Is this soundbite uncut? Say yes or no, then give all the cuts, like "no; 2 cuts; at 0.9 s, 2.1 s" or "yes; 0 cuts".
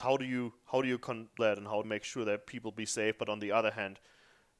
no; 2 cuts; at 1.4 s, 1.8 s